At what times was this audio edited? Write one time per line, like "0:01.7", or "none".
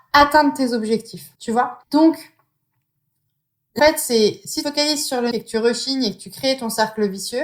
0:01.4
0:01.8
0:03.8
0:04.6
0:05.3